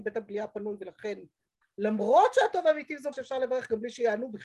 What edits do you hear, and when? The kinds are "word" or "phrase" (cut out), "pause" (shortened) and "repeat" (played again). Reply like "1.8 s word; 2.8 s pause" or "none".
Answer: 1.6 s word; 3.1 s word

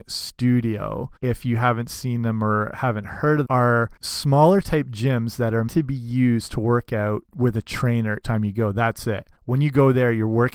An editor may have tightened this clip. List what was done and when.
1.2 s pause; 2.7 s word; 3.4 s phrase; 4.0 s pause; 5.7 s word; 7.3 s pause; 8.2 s word; 9.4 s pause

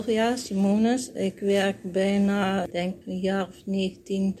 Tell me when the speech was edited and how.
none

